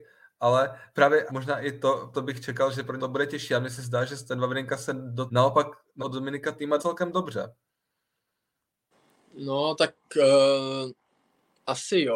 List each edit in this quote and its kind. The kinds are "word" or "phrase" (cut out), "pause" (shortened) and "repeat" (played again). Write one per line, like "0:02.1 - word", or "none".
0:01.3 - word
0:02.1 - word
0:03.0 - word
0:05.3 - word
0:06.0 - word
0:06.8 - word

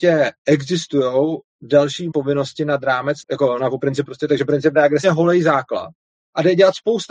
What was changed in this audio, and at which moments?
0:02.1 - word
0:03.2 - word
0:04.0 - word
0:05.0 - phrase
0:06.1 - pause

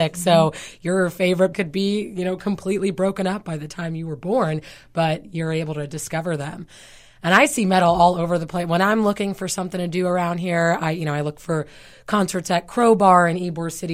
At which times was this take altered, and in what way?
0:01.5 - word

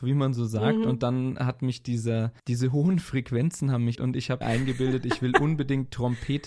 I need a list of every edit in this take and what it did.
0:02.4 - pause
0:03.9 - word
0:04.4 - word

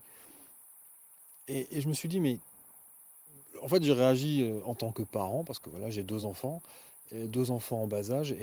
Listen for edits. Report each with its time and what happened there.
none

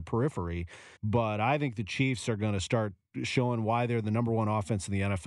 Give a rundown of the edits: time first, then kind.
0:01.0 - pause

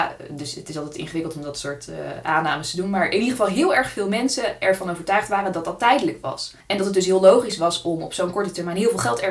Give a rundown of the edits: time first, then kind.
0:06.6 - pause

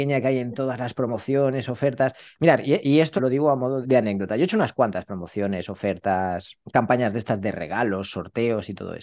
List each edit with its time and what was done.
0:03.2 - word
0:03.8 - word
0:06.6 - pause

